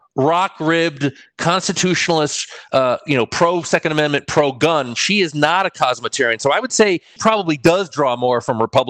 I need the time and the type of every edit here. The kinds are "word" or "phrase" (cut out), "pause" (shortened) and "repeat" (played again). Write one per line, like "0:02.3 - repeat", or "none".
0:07.2 - word

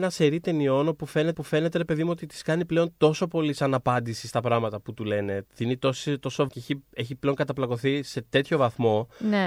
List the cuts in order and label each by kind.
0:01.3 - repeat
0:06.5 - phrase

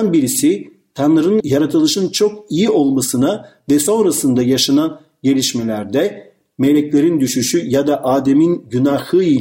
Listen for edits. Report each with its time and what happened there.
none

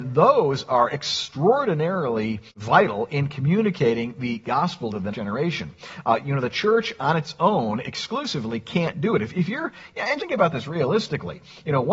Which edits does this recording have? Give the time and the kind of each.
0:02.5 - pause
0:05.1 - word
0:10.2 - word

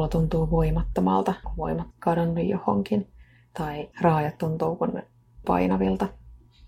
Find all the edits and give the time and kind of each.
0:01.4 - word
0:01.9 - word
0:03.9 - pause
0:05.4 - word

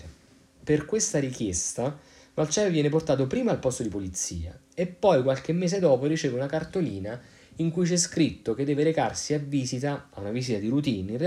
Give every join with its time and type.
none

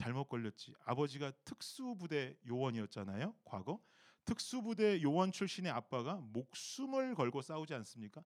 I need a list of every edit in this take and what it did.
none

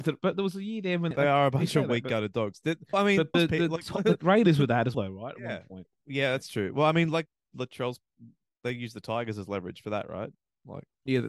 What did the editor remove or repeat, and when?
0:01.1 - word
0:02.9 - word
0:03.3 - word
0:04.9 - word
0:07.5 - word

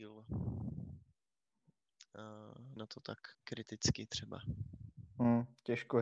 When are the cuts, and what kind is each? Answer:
0:02.8 - word
0:03.3 - pause

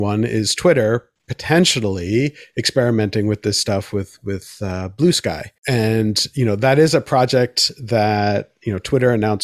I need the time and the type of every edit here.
0:05.6 - pause

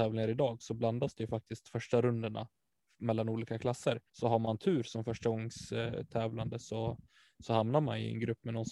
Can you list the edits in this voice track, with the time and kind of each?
0:04.1 - pause

